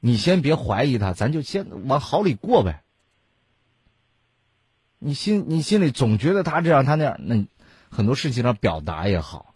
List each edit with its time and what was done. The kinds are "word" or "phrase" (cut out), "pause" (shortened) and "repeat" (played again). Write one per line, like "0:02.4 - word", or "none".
none